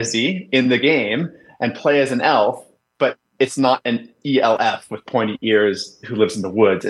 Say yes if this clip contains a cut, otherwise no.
no